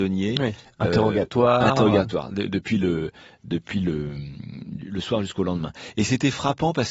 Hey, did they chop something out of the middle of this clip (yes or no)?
no